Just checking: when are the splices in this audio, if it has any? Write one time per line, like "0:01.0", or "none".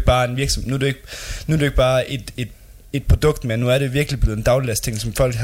none